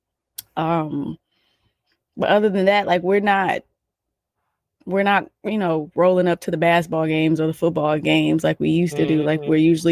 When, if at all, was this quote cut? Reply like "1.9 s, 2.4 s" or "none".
none